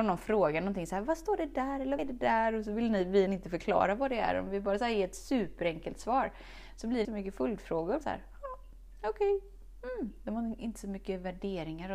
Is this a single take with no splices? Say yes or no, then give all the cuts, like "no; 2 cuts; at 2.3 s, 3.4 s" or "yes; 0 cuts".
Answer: no; 4 cuts; at 2.0 s, 3.3 s, 7.0 s, 8.0 s